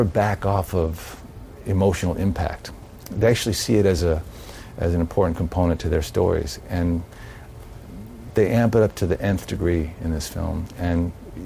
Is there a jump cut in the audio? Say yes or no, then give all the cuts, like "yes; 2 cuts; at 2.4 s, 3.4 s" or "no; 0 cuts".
no; 0 cuts